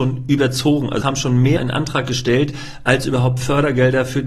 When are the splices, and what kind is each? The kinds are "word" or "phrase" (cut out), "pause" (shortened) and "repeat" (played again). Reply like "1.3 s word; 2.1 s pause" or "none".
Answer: 1.0 s word; 1.6 s word